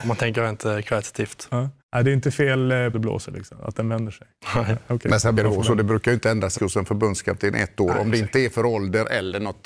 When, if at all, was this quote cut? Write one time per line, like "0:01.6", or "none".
0:01.8
0:02.9
0:05.4
0:06.6